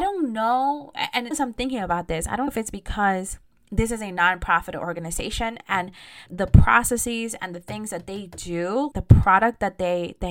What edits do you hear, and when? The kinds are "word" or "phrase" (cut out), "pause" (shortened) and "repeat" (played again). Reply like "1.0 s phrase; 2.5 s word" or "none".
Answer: 1.3 s word; 2.5 s word; 6.3 s word; 8.9 s word